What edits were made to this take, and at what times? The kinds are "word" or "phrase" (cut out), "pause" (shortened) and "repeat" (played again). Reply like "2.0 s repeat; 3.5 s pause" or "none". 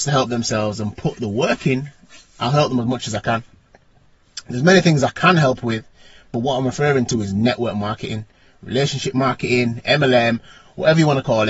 none